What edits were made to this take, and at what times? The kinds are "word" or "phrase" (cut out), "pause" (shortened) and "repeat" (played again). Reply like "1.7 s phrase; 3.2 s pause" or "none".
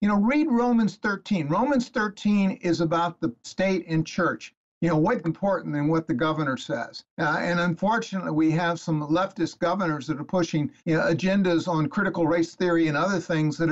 3.4 s phrase; 5.2 s phrase; 7.1 s pause; 10.8 s pause